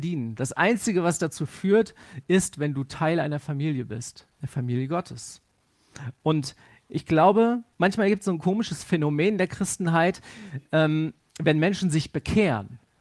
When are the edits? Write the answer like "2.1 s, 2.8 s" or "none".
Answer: 4.3 s, 7.7 s